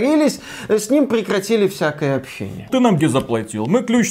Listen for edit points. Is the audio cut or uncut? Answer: cut